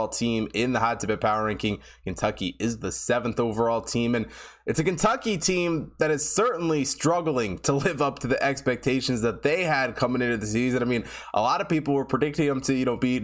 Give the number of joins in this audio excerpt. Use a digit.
0